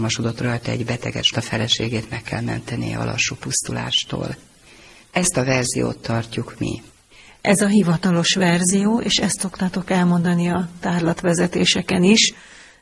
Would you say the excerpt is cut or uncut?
cut